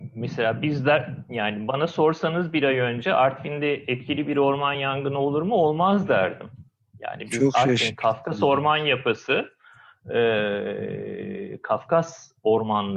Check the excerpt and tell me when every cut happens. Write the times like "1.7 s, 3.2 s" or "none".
none